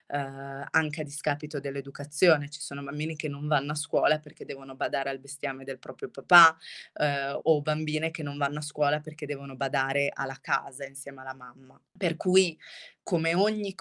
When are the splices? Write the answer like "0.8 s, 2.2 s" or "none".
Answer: 11.9 s